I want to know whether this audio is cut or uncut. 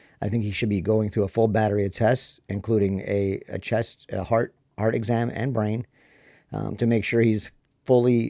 uncut